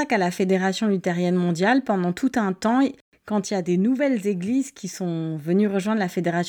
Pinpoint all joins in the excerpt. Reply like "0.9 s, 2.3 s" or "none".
none